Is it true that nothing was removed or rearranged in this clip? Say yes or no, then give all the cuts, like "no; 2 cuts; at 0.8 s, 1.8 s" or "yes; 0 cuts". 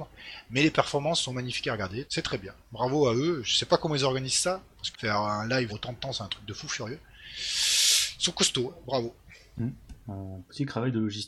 no; 3 cuts; at 2.0 s, 4.9 s, 5.7 s